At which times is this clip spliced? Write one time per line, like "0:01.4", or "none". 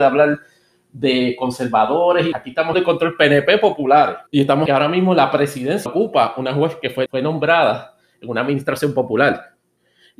0:02.3
0:02.7
0:04.3
0:04.7
0:05.9
0:07.1